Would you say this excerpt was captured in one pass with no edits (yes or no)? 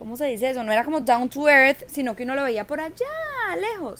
yes